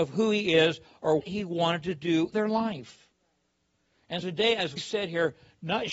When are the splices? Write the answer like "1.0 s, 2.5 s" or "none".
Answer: 1.2 s, 2.3 s, 4.2 s, 4.8 s